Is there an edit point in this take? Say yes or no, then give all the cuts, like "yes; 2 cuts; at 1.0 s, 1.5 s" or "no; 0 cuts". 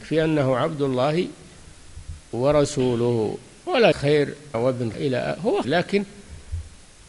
yes; 4 cuts; at 3.9 s, 4.5 s, 4.9 s, 5.6 s